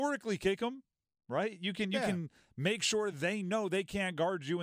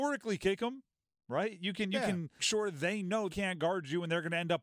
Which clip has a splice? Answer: second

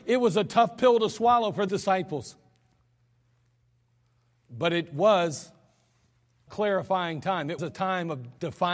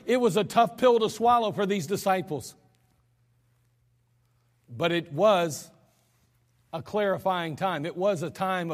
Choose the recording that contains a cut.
first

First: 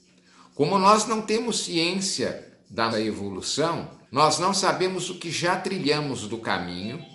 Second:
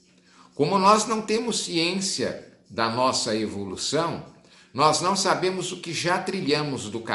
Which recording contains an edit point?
first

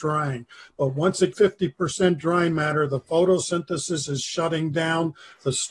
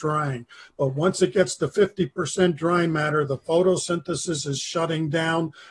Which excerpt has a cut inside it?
first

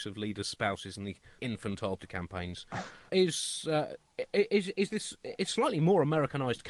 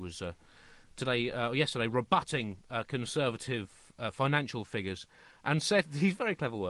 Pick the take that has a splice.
first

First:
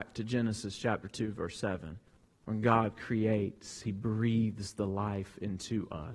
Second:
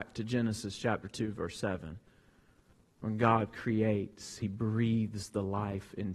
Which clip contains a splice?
first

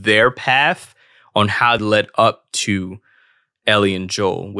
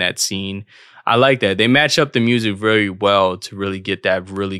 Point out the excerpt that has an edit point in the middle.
first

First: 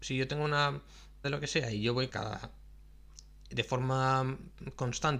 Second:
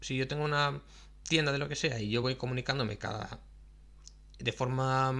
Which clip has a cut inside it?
first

